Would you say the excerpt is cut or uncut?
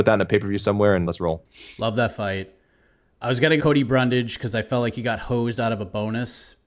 cut